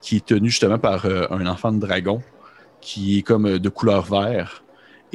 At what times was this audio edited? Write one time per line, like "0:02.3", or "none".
none